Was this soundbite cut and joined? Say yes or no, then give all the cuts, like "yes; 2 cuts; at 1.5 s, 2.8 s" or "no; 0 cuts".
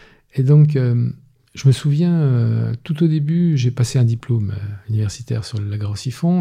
no; 0 cuts